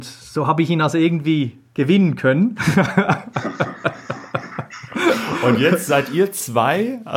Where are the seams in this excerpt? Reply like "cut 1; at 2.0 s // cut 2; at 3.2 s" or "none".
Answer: none